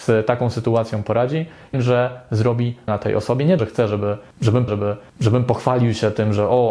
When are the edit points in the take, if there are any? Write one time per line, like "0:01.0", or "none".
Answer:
0:01.7
0:02.9
0:03.6
0:04.7